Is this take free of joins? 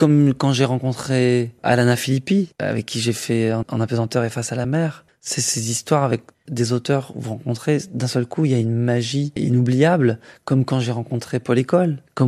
yes; 0 cuts

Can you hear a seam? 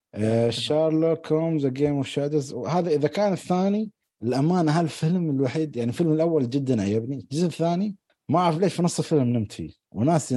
no; 0 cuts

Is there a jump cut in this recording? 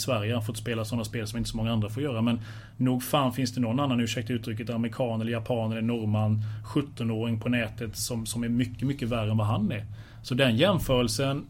no; 0 cuts

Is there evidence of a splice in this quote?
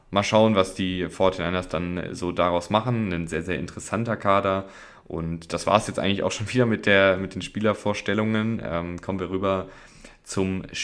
no; 0 cuts

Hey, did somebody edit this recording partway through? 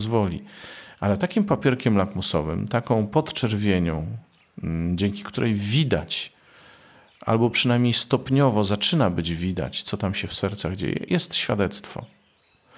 no; 0 cuts

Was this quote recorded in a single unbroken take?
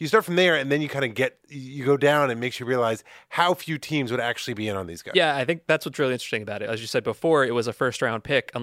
yes; 0 cuts

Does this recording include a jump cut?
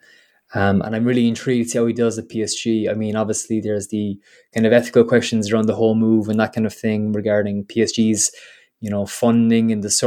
no; 0 cuts

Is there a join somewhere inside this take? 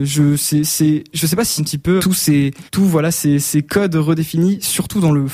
yes; 3 cuts; at 1.6 s, 2.0 s, 2.7 s

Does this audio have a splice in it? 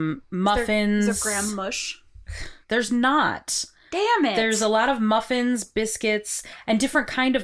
yes; 2 cuts; at 2.6 s, 3.8 s

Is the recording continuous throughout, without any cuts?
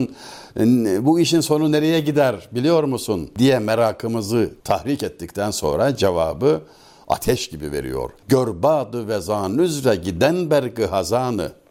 no; 1 cut; at 4.6 s

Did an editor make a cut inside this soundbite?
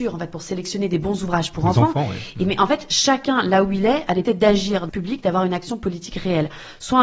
yes; 2 cuts; at 4.2 s, 4.9 s

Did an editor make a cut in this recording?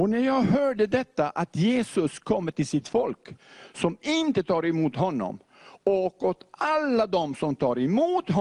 no; 0 cuts

